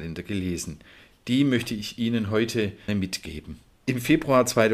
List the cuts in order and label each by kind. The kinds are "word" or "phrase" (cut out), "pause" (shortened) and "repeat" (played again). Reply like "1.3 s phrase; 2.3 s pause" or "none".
2.9 s word